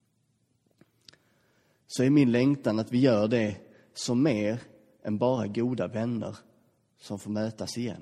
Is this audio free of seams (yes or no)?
yes